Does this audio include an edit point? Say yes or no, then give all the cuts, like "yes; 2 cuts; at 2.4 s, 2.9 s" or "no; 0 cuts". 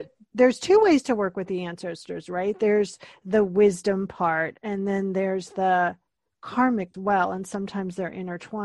yes; 1 cut; at 6.9 s